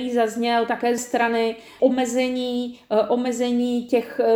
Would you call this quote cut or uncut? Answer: cut